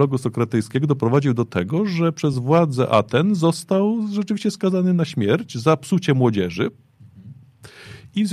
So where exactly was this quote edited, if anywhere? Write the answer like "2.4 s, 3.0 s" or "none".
none